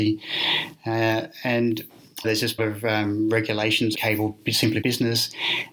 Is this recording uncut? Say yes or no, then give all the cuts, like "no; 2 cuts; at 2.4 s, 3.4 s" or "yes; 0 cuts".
no; 4 cuts; at 2.2 s, 2.6 s, 3.9 s, 4.8 s